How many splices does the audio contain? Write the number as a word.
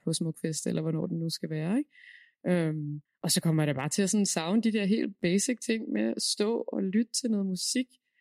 one